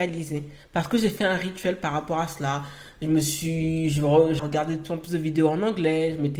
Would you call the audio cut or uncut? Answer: cut